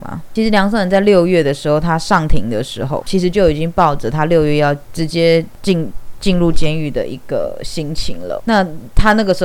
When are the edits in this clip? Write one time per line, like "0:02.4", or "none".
0:03.0
0:08.4